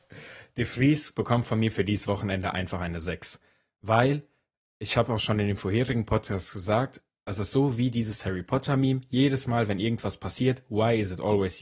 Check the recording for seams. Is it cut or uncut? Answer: uncut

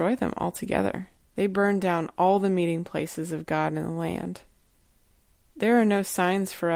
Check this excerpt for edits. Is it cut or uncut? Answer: cut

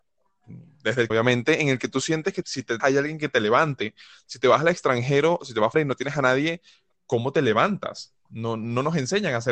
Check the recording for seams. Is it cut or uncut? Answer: cut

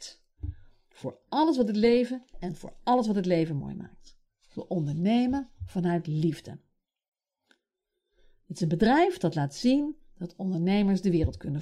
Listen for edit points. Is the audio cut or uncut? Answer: uncut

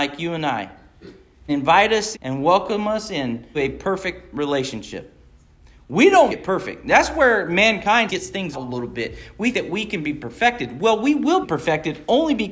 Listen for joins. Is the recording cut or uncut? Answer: cut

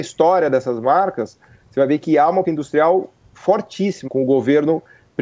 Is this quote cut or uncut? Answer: cut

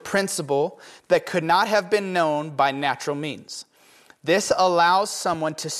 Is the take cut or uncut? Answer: uncut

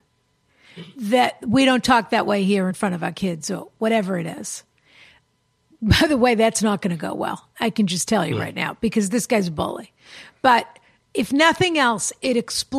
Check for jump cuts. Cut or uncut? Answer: uncut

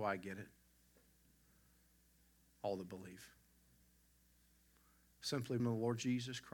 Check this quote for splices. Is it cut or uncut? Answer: cut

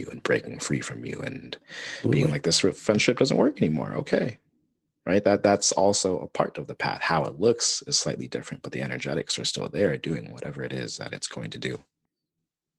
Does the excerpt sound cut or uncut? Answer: uncut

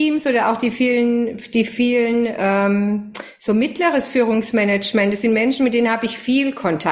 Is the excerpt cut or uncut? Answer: uncut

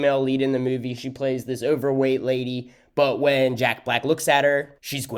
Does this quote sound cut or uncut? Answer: uncut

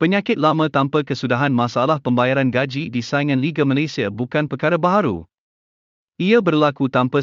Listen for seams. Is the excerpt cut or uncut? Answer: uncut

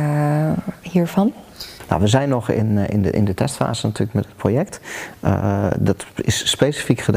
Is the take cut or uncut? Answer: uncut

